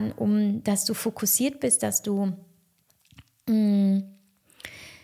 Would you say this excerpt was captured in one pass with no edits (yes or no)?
yes